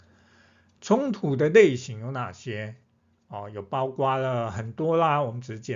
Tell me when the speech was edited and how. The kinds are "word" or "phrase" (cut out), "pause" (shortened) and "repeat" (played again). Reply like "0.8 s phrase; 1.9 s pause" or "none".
none

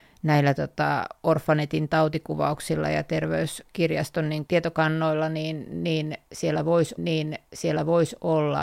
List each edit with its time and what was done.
4.5 s word; 7.0 s repeat

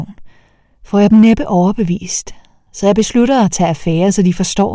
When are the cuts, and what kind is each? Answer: none

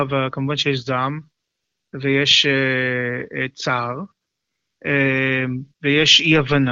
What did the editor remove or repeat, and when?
5.7 s pause

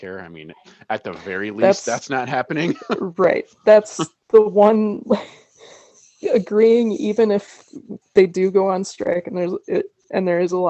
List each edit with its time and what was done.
none

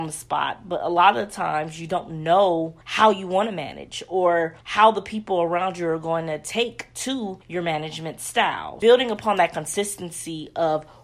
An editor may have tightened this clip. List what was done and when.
2.8 s pause; 4.6 s pause; 7.4 s pause

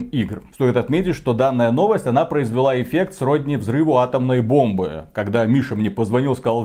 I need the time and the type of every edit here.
none

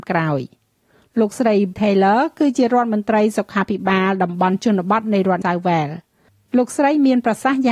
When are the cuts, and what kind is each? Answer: 1.7 s word; 5.4 s word

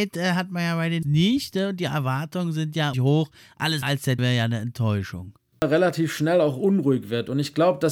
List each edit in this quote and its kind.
1.0 s phrase; 2.9 s word; 3.8 s word; 4.2 s word

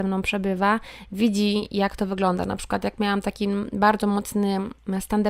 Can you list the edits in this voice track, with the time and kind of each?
none

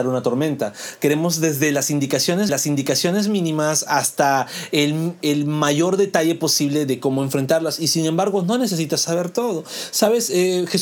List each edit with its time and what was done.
2.5 s repeat

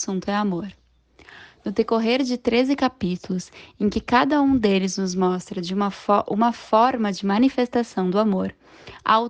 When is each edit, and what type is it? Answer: none

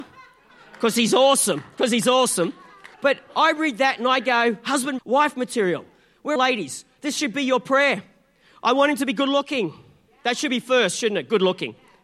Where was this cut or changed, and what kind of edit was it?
2.9 s pause; 5.0 s word; 6.4 s phrase

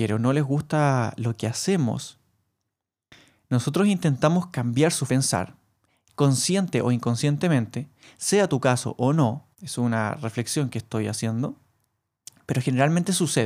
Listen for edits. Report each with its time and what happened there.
5.1 s phrase; 9.5 s pause

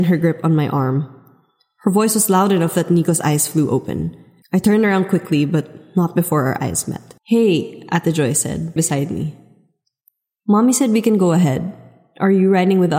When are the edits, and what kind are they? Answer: 4.4 s pause; 7.2 s pause; 8.8 s word

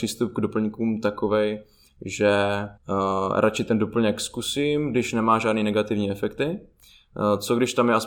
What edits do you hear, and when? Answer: 2.8 s pause

